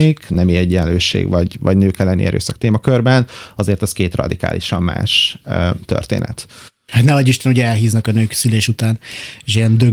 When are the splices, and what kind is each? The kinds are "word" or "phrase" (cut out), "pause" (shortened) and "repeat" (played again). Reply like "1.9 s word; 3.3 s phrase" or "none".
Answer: none